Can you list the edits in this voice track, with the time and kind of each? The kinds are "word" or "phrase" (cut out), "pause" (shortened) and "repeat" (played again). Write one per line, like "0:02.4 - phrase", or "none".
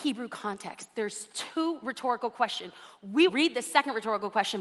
0:03.3 - word